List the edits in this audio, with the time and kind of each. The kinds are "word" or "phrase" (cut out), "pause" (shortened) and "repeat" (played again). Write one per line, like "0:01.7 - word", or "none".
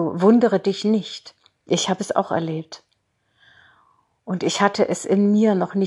none